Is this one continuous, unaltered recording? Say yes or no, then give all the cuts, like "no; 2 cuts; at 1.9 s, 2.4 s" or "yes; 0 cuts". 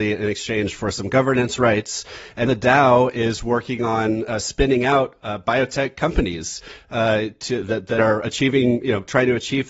no; 2 cuts; at 2.4 s, 7.9 s